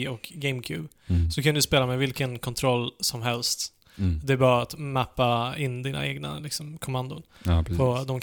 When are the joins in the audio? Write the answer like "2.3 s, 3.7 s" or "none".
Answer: none